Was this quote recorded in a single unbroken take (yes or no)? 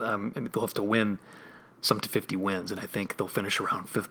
no